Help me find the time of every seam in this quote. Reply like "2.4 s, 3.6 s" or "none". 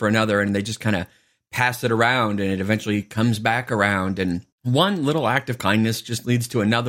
4.5 s